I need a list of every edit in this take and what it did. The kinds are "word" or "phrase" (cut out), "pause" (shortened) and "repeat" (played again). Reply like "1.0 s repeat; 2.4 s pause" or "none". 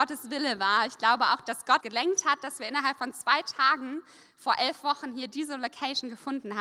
1.8 s word